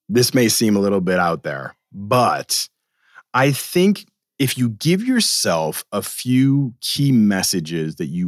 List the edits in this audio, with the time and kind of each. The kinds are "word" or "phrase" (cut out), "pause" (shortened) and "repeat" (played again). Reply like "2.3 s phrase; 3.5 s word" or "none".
none